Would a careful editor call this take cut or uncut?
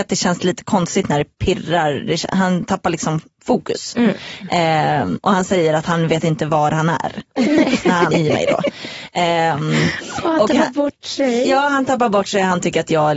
cut